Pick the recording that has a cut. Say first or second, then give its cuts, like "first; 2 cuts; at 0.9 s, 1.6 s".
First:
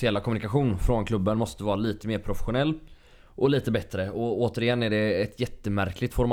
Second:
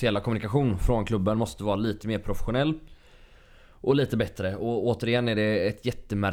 first; 1 cut; at 3.2 s